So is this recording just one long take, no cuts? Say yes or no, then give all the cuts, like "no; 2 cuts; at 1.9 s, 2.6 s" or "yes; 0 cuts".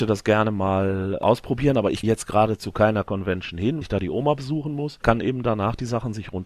no; 3 cuts; at 2.0 s, 3.8 s, 5.0 s